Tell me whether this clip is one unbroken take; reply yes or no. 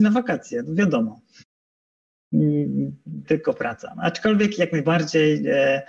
no